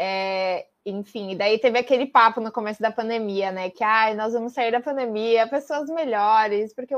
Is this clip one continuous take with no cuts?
yes; 0 cuts

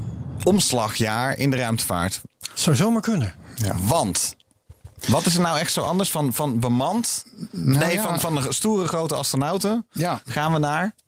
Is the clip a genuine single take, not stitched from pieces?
yes; 0 cuts

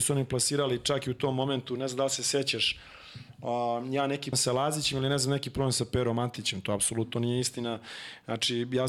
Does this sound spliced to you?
yes; 1 cut; at 4.3 s

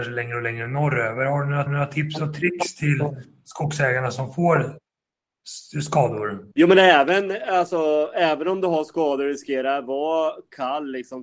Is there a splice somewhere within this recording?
yes; 2 cuts; at 1.7 s, 6.5 s

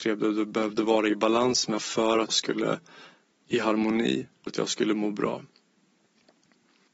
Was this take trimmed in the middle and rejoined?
yes; 4 cuts; at 1.8 s, 2.3 s, 3.3 s, 4.5 s

